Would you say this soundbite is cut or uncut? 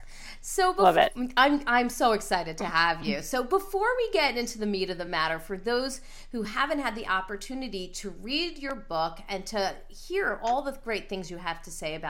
uncut